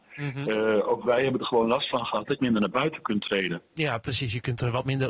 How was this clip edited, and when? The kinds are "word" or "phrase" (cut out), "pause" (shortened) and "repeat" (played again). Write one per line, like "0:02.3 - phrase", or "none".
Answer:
0:02.4 - phrase